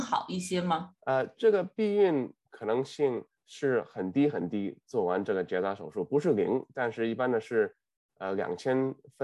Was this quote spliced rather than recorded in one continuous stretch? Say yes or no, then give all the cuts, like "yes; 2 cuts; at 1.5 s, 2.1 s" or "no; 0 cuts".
yes; 2 cuts; at 1.0 s, 3.4 s